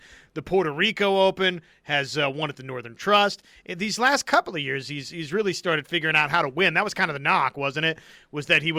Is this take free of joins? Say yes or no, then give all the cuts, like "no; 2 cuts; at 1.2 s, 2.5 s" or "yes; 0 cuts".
yes; 0 cuts